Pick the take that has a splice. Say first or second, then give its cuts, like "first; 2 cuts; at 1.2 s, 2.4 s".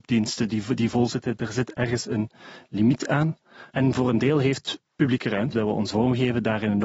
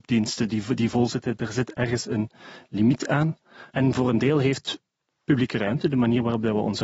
first; 3 cuts; at 4.8 s, 5.5 s, 5.9 s